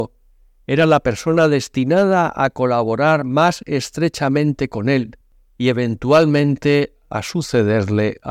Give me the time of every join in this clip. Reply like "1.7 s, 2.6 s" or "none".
none